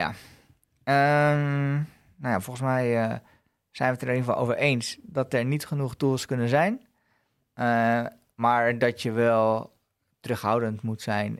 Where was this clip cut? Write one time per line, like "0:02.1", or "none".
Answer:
none